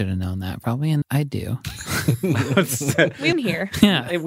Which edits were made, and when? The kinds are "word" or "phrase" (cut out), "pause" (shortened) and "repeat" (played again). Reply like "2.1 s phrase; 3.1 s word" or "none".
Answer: 1.0 s word; 3.3 s word

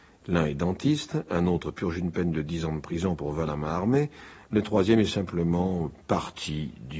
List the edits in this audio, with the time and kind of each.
none

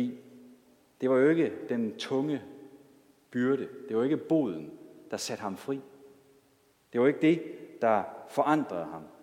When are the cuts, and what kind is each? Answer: none

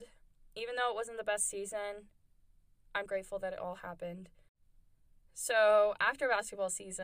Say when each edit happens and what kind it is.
3.1 s word

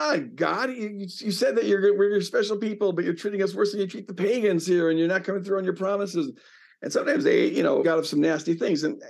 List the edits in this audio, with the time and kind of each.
7.8 s word

